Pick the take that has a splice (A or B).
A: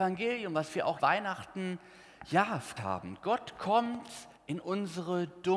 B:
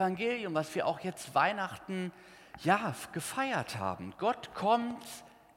A